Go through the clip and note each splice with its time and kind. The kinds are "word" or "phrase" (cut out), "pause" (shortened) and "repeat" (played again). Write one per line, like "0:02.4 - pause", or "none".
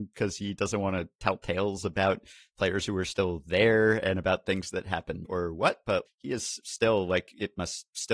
0:05.2 - word
0:06.1 - word